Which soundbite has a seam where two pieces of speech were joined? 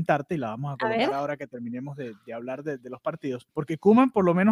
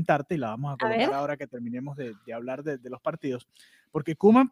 first; 1 cut; at 3.5 s

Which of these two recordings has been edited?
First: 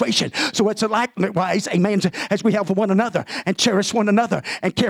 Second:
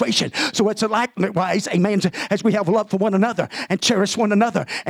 first; 1 cut; at 2.6 s

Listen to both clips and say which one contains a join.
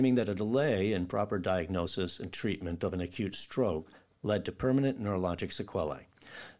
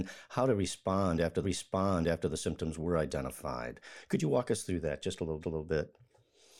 second; 2 cuts; at 1.4 s, 5.4 s

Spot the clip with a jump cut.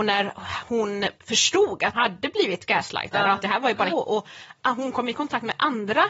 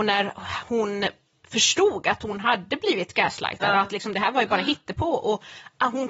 first; 4 cuts; at 1.2 s, 1.9 s, 3.4 s, 3.9 s

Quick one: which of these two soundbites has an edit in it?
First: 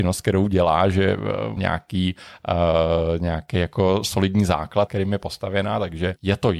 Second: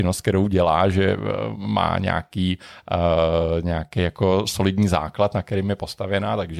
first; 2 cuts; at 1.6 s, 4.9 s

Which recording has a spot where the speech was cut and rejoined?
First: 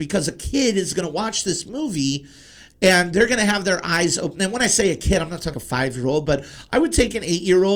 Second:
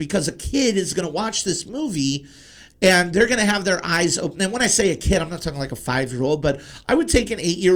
first; 1 cut; at 5.5 s

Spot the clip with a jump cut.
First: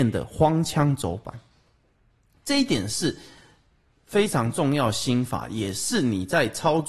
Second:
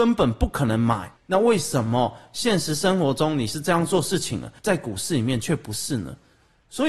second; 2 cuts; at 1.2 s, 4.6 s

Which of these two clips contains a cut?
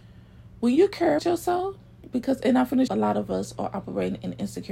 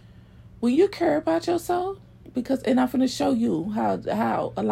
first; 2 cuts; at 1.2 s, 2.9 s

